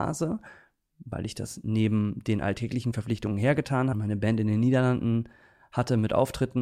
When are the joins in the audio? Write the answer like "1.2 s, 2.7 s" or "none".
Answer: 3.9 s